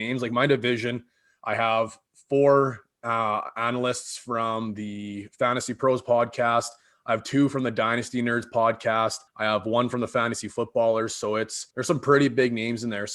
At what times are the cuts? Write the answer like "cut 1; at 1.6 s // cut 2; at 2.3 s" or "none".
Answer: cut 1; at 9.3 s // cut 2; at 11.7 s

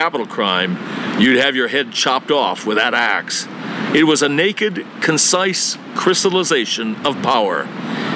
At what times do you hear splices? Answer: none

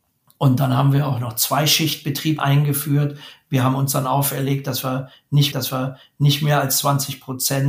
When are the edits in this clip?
cut 1; at 2.4 s // cut 2; at 5.5 s

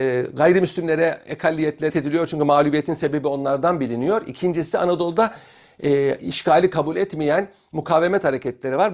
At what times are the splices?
cut 1; at 1.9 s

